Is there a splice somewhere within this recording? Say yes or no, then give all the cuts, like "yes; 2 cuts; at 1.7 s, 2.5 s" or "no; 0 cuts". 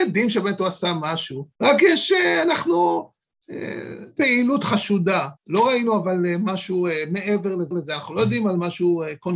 yes; 4 cuts; at 1.5 s, 4.2 s, 5.4 s, 7.7 s